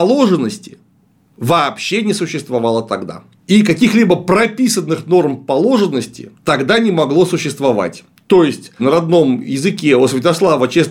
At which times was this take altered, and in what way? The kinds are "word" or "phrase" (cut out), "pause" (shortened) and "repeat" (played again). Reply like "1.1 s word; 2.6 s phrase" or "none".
6.3 s pause; 8.8 s phrase

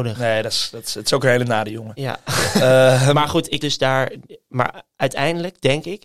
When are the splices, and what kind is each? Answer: 3.6 s word

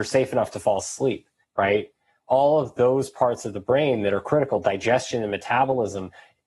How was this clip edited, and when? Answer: 1.4 s pause

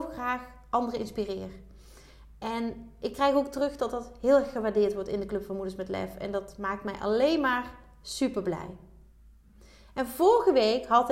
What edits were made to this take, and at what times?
none

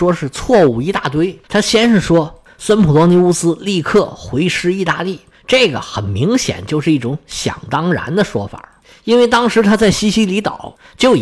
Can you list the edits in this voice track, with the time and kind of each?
1.4 s pause

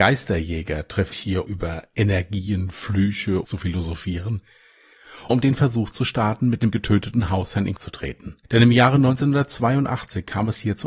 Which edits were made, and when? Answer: 1.1 s word; 1.5 s word; 3.4 s phrase; 5.3 s word; 6.7 s word; 7.8 s word; 8.4 s pause

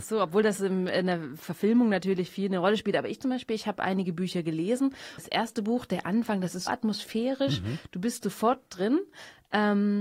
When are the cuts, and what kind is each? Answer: 5.2 s phrase; 6.7 s word

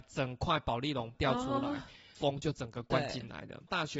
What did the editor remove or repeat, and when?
none

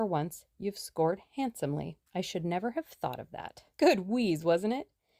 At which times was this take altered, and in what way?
2.1 s pause; 3.7 s pause

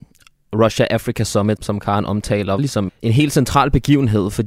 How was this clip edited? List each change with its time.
1.6 s word; 2.6 s word; 2.9 s word

